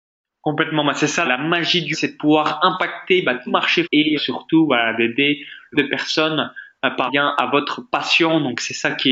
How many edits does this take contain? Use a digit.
7